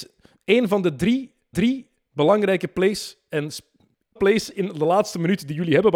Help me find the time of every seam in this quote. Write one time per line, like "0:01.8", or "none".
0:01.5
0:04.2

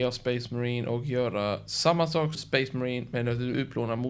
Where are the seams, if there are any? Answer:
0:02.3

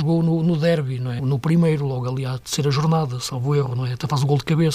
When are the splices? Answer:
0:01.2

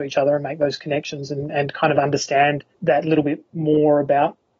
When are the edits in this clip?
0:02.7

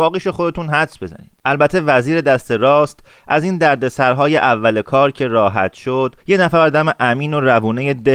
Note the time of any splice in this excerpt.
0:01.4
0:06.2

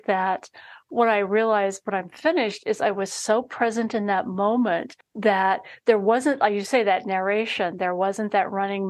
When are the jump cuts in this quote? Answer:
0:05.0

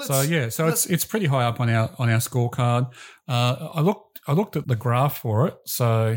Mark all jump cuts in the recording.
0:04.6

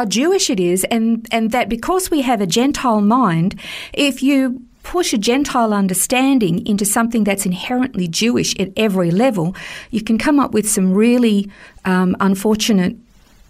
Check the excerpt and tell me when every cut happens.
none

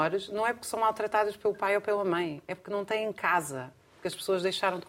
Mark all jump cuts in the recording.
none

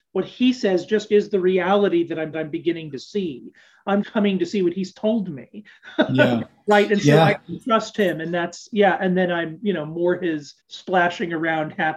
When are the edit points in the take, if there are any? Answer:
0:02.3
0:04.0
0:10.6

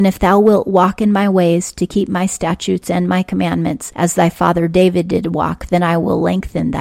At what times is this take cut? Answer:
none

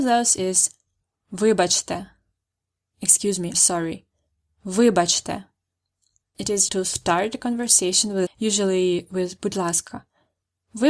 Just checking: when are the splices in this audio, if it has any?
0:03.5
0:06.7
0:08.3

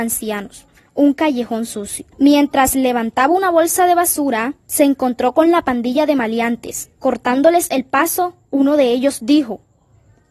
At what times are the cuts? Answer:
0:02.1
0:04.6
0:07.0

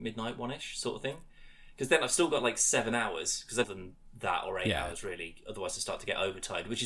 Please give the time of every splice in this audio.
0:03.6

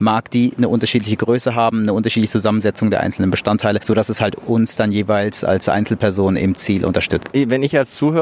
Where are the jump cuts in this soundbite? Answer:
none

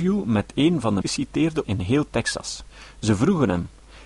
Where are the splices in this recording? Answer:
0:01.0
0:01.6

